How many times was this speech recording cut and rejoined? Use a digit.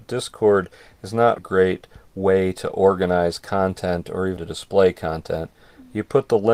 2